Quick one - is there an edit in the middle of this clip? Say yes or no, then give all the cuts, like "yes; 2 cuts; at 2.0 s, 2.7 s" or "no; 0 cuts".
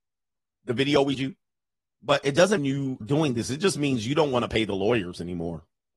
yes; 3 cuts; at 1.1 s, 2.6 s, 3.0 s